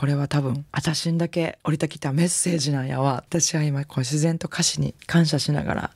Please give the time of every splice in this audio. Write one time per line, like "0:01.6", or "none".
0:03.3